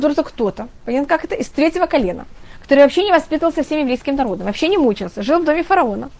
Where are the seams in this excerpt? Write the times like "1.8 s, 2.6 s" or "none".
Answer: none